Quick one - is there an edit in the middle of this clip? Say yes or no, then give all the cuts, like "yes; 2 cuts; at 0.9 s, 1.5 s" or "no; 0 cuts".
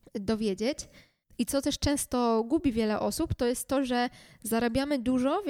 no; 0 cuts